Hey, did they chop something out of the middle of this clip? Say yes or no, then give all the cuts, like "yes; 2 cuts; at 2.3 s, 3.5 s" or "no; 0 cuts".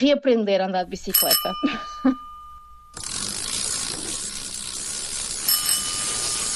no; 0 cuts